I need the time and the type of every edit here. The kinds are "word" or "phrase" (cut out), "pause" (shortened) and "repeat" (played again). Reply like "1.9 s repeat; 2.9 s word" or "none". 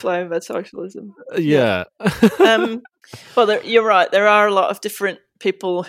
none